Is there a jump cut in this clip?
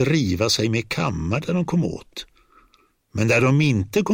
no; 0 cuts

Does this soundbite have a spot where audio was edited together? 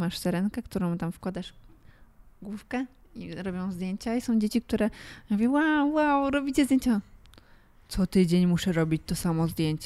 no; 0 cuts

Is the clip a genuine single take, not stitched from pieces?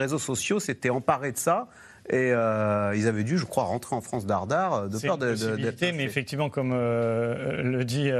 yes; 0 cuts

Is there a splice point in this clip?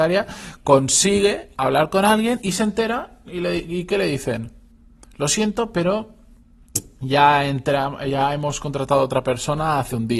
no; 0 cuts

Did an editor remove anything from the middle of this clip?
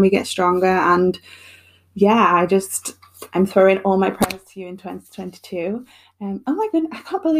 no; 0 cuts

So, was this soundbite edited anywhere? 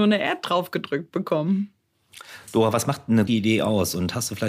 yes; 1 cut; at 3.3 s

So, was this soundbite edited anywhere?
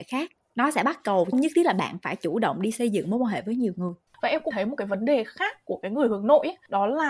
yes; 2 cuts; at 1.3 s, 4.5 s

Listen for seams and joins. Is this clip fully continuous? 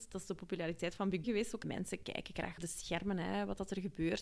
no; 3 cuts; at 1.2 s, 1.6 s, 2.6 s

